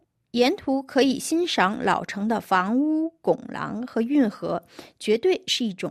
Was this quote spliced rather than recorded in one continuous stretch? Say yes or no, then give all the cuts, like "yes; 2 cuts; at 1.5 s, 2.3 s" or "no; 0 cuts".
no; 0 cuts